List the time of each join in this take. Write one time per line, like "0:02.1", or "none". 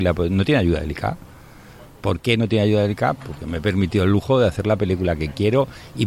none